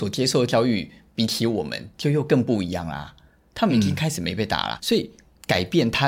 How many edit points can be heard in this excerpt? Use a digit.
1